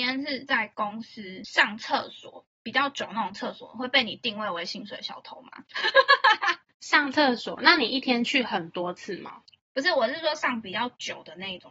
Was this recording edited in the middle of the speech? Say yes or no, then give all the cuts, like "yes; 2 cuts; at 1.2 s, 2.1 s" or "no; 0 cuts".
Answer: no; 0 cuts